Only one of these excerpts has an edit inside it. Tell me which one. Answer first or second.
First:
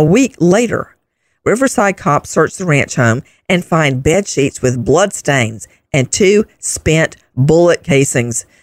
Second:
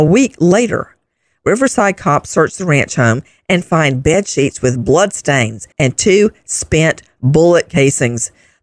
second